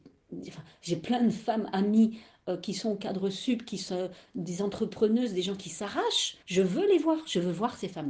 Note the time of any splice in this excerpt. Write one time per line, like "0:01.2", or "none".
0:06.4